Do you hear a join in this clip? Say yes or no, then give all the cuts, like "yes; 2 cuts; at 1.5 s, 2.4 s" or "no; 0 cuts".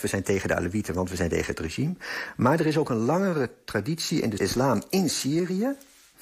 yes; 1 cut; at 4.4 s